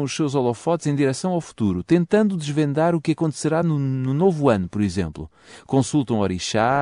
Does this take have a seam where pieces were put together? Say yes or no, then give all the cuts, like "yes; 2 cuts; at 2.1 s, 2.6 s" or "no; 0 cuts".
no; 0 cuts